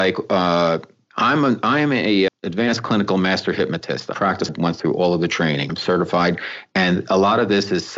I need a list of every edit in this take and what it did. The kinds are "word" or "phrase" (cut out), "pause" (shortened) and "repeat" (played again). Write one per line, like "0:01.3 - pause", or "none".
0:02.3 - word
0:04.1 - word
0:04.5 - phrase
0:05.7 - word